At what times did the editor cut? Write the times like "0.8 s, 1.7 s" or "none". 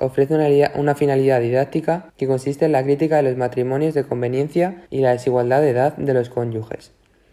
2.1 s, 4.9 s